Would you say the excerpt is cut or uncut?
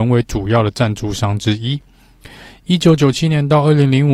uncut